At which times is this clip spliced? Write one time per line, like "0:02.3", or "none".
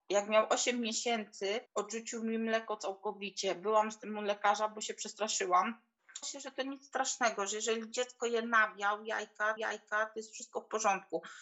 0:01.7
0:06.2
0:09.6

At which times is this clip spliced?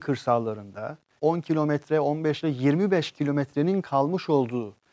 0:01.2
0:02.4

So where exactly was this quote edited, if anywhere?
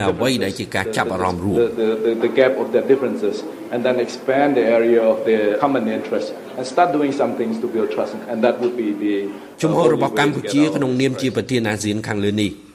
0:05.6
0:08.3

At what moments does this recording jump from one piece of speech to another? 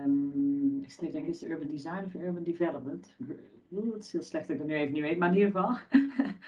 none

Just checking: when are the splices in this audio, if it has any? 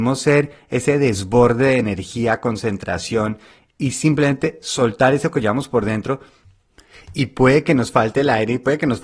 none

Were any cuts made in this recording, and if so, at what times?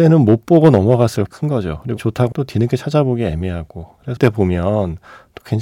0:01.3
0:02.0
0:02.3
0:04.2

